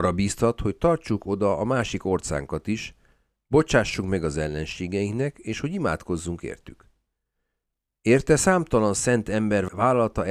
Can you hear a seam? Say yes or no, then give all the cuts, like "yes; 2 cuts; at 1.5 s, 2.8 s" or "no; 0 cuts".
no; 0 cuts